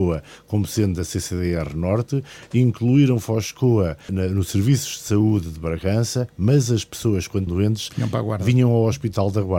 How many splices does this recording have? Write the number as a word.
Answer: two